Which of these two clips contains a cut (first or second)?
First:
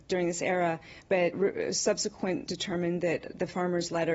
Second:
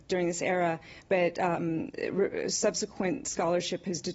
first